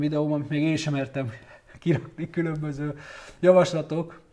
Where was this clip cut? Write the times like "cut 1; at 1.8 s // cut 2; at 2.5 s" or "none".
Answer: none

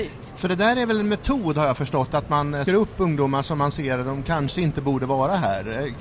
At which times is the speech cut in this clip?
cut 1; at 2.7 s

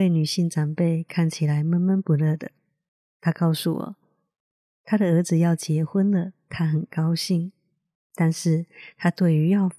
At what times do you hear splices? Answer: none

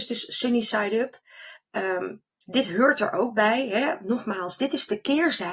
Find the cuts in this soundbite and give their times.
none

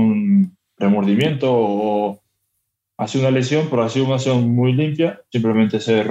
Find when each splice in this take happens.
none

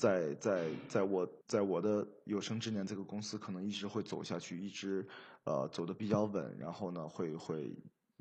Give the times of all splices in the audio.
cut 1; at 1.4 s

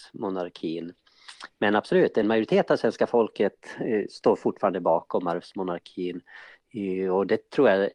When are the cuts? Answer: none

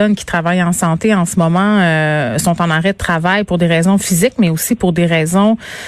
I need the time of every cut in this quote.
none

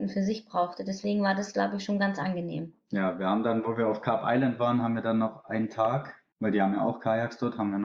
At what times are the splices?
cut 1; at 6.3 s

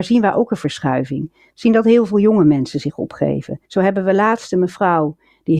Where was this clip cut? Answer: cut 1; at 3.7 s

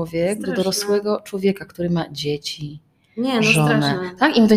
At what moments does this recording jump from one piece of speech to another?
none

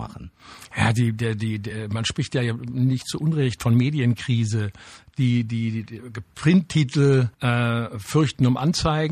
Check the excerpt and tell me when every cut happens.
cut 1; at 7.3 s

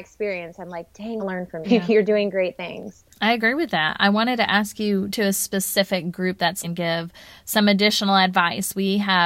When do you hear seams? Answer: cut 1; at 1.2 s // cut 2; at 1.6 s // cut 3; at 3.1 s // cut 4; at 5.1 s // cut 5; at 6.6 s

